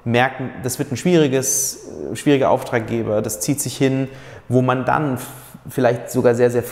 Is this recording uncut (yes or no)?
yes